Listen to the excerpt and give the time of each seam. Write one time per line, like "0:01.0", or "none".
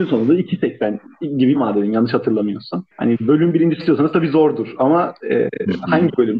0:01.5
0:02.9
0:03.8